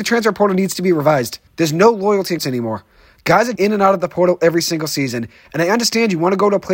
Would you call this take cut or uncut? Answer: cut